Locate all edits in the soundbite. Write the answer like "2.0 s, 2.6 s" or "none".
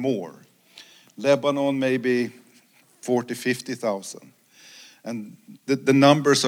none